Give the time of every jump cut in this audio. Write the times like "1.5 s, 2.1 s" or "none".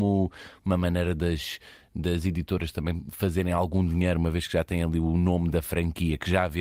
none